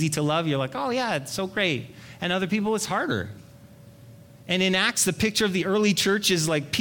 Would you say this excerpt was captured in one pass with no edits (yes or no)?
yes